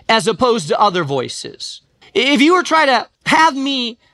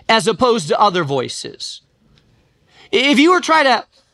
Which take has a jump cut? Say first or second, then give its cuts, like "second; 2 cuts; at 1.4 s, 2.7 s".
first; 2 cuts; at 2.0 s, 3.1 s